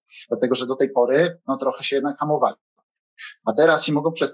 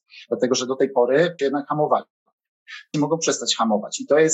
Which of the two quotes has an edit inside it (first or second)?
second